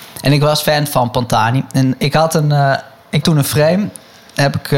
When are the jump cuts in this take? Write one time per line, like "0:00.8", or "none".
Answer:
0:03.2